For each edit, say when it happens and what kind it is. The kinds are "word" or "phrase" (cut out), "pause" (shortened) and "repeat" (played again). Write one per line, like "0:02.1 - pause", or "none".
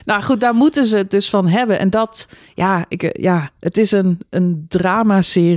none